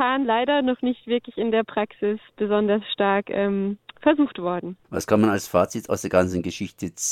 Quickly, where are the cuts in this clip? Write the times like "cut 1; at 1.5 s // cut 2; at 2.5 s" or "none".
cut 1; at 4.8 s